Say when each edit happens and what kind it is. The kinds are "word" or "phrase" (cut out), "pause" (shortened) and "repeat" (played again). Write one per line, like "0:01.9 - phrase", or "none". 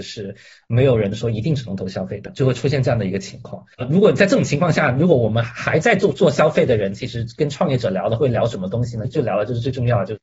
0:03.7 - pause